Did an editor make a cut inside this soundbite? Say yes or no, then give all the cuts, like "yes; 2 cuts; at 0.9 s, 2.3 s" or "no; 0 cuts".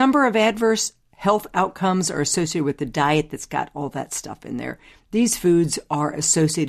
no; 0 cuts